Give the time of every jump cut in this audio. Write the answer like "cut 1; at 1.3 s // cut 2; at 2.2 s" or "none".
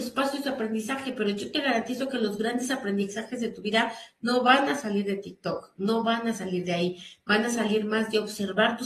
none